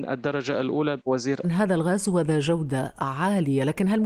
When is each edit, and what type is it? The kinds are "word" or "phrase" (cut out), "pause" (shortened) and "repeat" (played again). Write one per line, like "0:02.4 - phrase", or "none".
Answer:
0:01.0 - word
0:01.4 - phrase

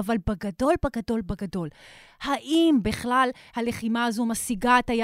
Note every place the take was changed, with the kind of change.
none

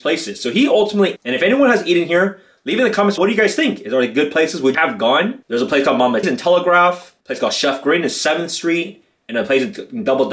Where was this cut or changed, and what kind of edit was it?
0:01.2 - phrase
0:03.2 - word
0:04.7 - word
0:05.4 - pause
0:06.2 - word
0:07.2 - pause

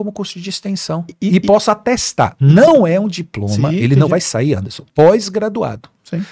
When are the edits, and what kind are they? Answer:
0:04.9 - pause

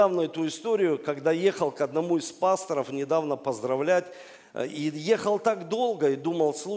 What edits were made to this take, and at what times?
none

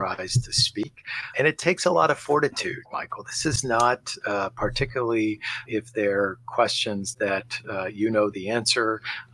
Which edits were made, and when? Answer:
0:01.3 - word
0:02.8 - phrase
0:05.7 - word

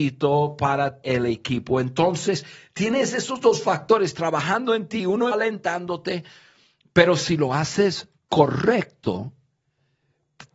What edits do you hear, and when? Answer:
0:01.0 - word
0:05.3 - phrase
0:08.2 - pause

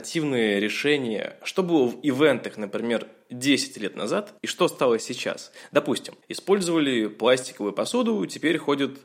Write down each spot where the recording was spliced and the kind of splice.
0:04.4 - pause

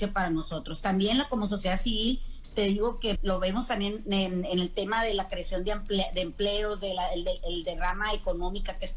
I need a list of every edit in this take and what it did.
0:03.2 - word

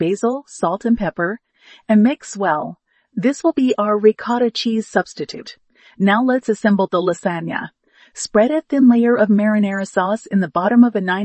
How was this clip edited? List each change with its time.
none

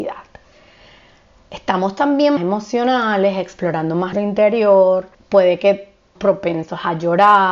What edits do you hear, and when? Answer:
0:02.4 - phrase
0:04.1 - word
0:05.1 - pause
0:06.2 - word

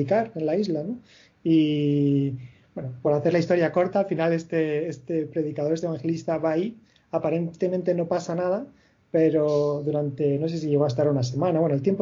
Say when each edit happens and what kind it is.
none

